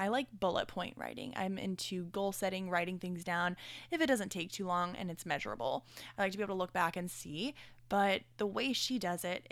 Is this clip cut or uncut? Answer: uncut